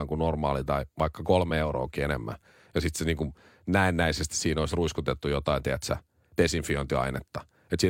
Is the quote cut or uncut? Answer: uncut